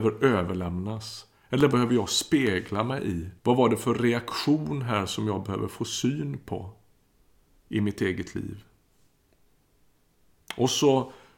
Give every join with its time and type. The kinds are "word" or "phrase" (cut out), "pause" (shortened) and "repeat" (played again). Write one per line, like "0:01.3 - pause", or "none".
0:01.7 - word
0:03.4 - pause